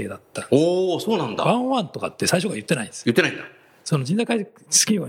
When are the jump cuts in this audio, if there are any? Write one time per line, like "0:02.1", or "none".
none